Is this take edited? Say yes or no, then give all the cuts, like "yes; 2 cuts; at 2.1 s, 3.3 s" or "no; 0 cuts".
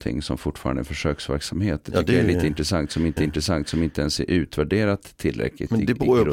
yes; 1 cut; at 3.2 s